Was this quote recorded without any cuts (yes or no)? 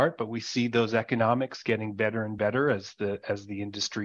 yes